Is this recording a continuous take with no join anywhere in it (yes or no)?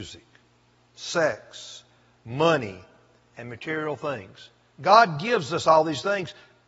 yes